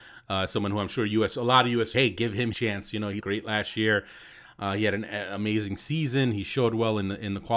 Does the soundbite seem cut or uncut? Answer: cut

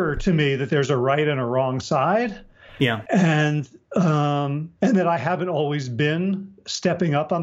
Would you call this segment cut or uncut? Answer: cut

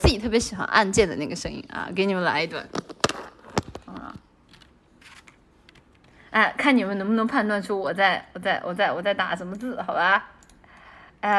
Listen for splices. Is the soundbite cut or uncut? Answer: uncut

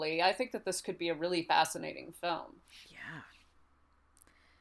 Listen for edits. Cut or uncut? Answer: uncut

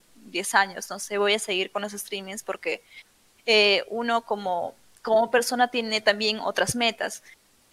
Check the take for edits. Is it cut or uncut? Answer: uncut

